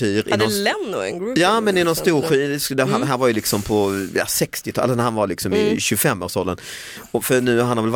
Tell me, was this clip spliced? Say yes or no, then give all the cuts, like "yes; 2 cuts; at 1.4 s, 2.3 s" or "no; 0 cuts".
no; 0 cuts